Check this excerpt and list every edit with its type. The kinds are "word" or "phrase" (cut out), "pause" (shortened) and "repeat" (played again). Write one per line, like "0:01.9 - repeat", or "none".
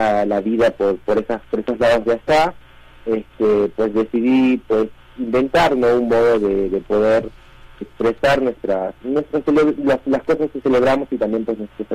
0:07.8 - word